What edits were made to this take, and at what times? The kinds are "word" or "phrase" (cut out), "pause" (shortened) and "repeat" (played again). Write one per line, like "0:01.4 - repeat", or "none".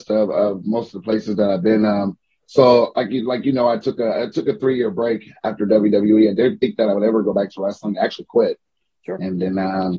none